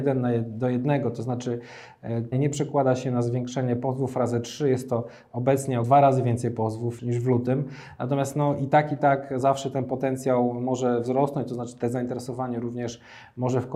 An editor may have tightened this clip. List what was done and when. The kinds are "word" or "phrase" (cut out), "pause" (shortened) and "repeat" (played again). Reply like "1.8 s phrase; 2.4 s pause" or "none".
2.3 s phrase; 5.8 s word; 7.0 s word